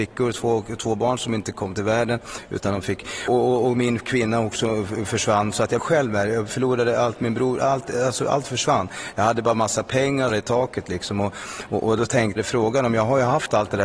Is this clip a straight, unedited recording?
no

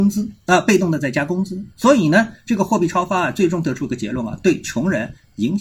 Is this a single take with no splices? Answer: yes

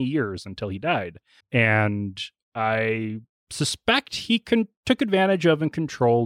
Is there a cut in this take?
yes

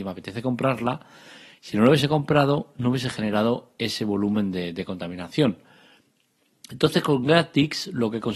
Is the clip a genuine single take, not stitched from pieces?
yes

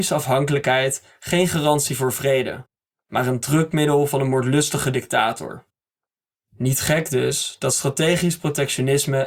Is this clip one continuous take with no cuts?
yes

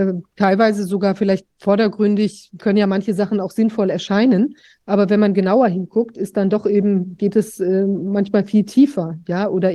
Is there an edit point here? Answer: no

